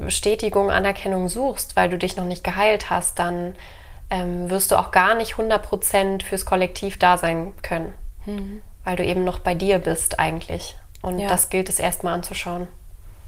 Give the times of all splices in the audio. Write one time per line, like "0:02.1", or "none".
none